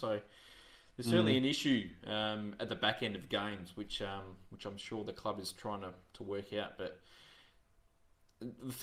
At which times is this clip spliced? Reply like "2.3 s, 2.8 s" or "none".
none